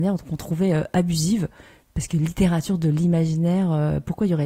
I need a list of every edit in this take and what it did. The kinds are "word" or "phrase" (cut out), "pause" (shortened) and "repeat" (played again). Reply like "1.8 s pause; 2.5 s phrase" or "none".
none